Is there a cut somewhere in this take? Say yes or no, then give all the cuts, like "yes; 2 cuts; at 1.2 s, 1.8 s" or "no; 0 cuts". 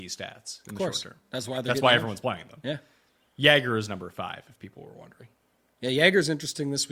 no; 0 cuts